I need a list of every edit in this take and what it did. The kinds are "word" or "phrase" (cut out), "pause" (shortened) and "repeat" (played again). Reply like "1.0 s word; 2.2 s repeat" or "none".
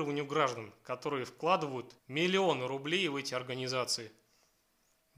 2.0 s pause